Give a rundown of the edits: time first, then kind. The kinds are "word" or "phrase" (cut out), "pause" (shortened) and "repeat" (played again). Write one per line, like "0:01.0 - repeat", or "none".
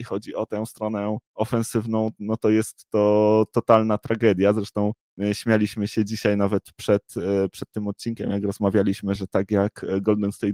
none